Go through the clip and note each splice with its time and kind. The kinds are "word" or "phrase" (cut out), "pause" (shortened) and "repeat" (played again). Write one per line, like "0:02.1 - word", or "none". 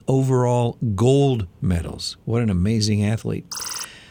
none